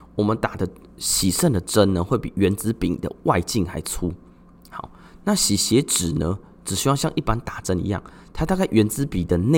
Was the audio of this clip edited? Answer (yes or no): no